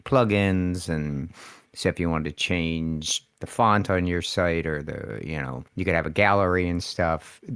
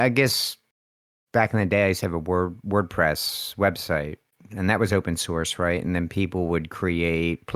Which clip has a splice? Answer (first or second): first